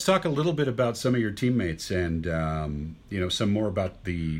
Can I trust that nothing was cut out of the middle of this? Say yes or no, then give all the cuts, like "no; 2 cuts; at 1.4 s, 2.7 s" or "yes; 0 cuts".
yes; 0 cuts